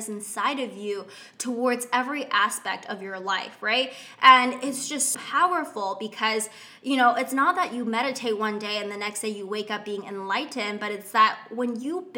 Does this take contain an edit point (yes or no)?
yes